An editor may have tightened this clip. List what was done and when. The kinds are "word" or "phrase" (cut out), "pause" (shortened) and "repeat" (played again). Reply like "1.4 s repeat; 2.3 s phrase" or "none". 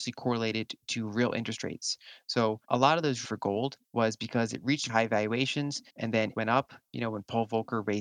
2.6 s pause; 3.2 s phrase; 3.8 s pause; 4.9 s word; 5.9 s pause; 6.3 s phrase